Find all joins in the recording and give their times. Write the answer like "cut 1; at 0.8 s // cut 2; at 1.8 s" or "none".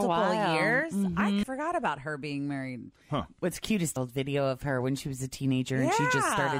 cut 1; at 1.4 s // cut 2; at 4.0 s